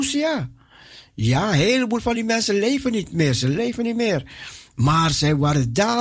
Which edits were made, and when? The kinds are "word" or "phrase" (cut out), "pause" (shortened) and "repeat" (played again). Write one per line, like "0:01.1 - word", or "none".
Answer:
none